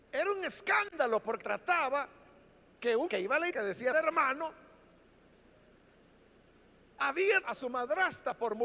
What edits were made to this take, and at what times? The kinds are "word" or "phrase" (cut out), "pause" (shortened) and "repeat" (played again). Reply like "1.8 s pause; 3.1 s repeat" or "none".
1.4 s word; 3.1 s word; 3.5 s word; 3.9 s word; 7.4 s word

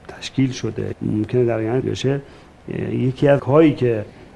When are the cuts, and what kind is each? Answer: 0.9 s word; 1.8 s word; 3.4 s word

